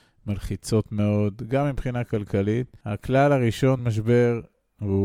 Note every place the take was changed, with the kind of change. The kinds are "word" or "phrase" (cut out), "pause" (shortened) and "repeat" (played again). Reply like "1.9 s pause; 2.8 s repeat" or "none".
2.8 s pause; 3.8 s word